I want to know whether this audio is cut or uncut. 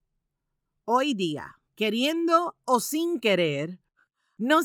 cut